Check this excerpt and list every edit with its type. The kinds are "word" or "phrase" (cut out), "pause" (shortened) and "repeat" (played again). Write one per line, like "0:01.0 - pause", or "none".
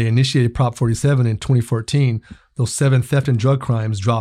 none